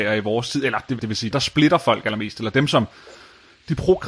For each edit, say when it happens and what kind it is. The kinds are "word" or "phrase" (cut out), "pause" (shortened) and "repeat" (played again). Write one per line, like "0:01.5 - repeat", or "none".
0:01.0 - word
0:01.3 - word